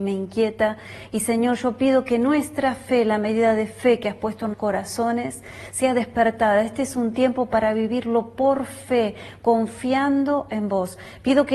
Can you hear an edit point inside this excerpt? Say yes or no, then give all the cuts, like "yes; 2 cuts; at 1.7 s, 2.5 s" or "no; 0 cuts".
yes; 1 cut; at 4.5 s